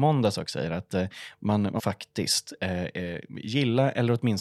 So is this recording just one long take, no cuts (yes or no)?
no